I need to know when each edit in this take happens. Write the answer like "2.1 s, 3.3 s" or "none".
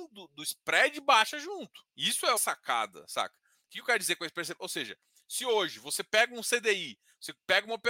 1.9 s, 2.4 s